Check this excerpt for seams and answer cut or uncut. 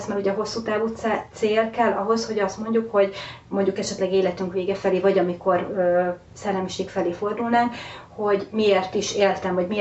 uncut